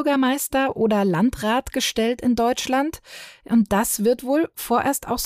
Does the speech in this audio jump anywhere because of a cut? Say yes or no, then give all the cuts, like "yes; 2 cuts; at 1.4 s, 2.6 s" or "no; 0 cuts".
no; 0 cuts